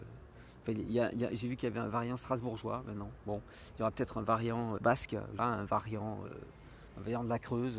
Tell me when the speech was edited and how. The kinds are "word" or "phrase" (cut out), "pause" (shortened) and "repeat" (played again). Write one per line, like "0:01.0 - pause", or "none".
0:04.8 - word
0:05.4 - phrase